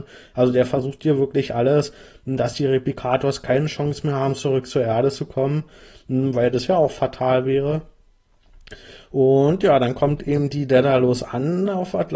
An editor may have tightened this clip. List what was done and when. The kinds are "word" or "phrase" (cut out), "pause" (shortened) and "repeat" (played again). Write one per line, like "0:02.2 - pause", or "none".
none